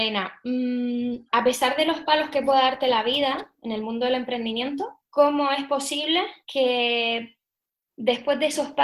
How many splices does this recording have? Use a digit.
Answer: 2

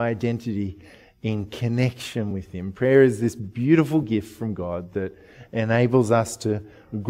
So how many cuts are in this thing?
0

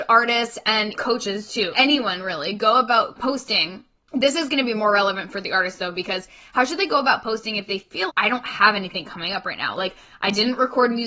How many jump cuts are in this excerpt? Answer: 3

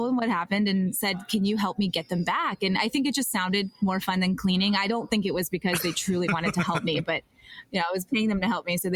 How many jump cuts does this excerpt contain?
0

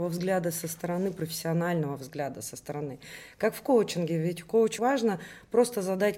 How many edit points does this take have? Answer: 1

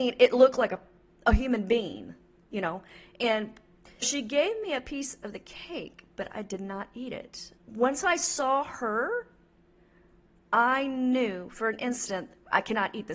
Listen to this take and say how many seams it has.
2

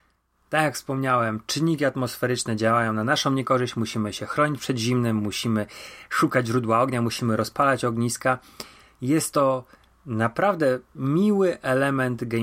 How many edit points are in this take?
0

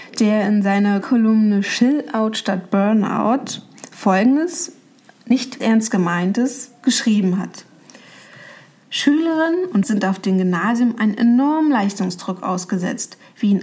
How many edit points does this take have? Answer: 3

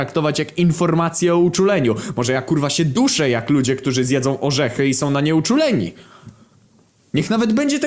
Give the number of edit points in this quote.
0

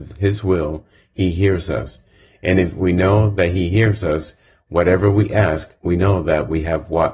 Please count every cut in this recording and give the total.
0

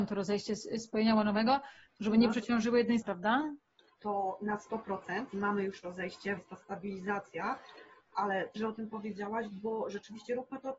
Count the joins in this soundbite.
4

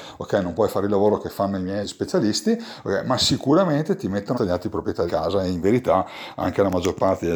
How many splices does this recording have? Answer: 3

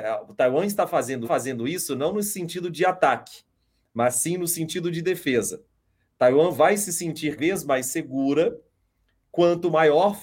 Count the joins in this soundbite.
2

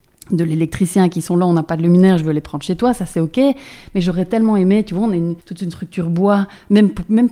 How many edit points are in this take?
1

